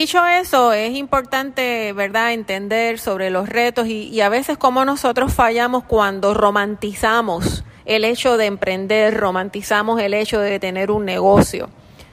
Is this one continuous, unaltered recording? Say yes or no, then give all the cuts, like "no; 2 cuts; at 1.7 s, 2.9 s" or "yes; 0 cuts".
no; 1 cut; at 7.8 s